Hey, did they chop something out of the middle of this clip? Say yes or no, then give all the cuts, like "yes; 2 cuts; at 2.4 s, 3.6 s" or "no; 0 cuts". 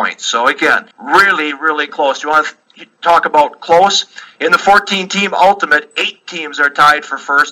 yes; 1 cut; at 0.9 s